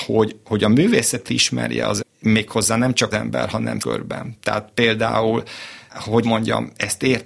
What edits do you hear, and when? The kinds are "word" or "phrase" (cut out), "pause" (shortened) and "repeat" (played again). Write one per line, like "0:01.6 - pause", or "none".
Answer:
0:01.3 - word
0:02.0 - word
0:03.1 - word
0:03.8 - word
0:05.9 - word
0:06.2 - word